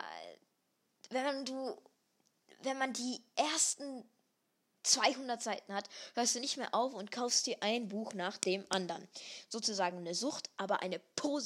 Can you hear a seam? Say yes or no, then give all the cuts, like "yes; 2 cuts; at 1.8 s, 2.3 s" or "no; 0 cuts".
no; 0 cuts